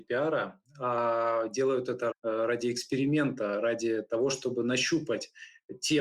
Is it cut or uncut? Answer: cut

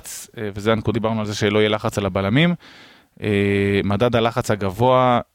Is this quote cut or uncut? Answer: cut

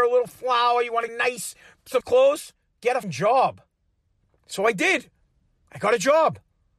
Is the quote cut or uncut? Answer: cut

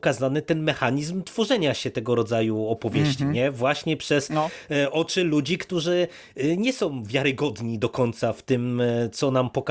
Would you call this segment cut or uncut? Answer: uncut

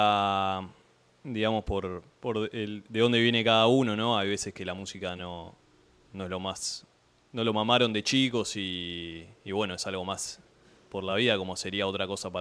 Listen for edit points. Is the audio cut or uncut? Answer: uncut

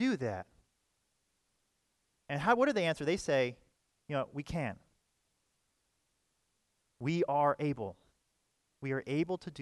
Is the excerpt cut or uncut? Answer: uncut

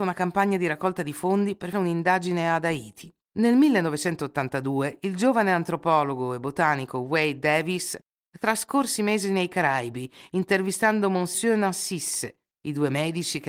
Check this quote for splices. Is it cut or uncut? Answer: cut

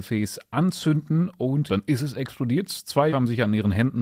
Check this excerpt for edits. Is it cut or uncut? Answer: cut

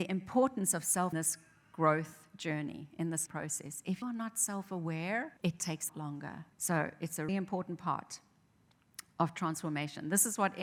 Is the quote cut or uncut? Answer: cut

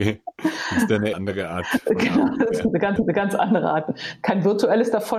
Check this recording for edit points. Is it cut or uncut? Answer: cut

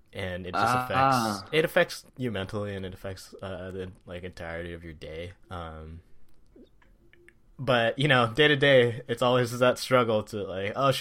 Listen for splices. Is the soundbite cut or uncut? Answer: cut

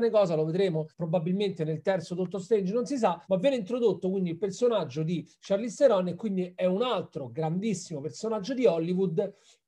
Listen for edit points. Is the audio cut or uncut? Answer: cut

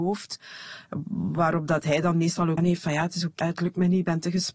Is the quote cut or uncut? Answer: cut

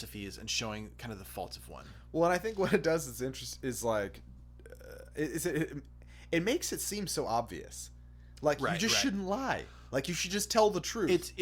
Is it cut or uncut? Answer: uncut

